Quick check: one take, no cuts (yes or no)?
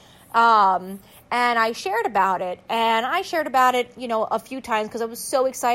yes